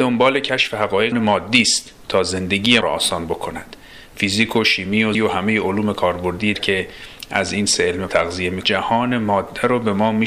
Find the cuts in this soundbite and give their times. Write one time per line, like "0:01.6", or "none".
0:01.1
0:02.8
0:05.1
0:06.5
0:08.1
0:08.6